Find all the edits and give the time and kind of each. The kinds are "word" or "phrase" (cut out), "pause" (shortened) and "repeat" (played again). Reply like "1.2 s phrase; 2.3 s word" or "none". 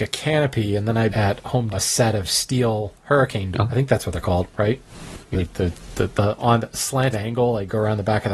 1.1 s word; 1.7 s word; 3.5 s word; 5.3 s word; 6.1 s word; 7.1 s word